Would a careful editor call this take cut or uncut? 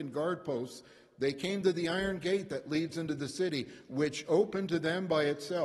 uncut